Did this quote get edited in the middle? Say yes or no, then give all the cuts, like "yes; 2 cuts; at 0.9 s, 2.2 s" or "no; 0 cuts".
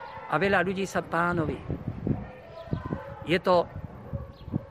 yes; 1 cut; at 1.0 s